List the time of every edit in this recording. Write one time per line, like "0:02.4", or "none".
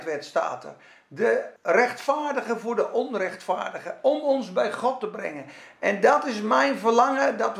0:01.6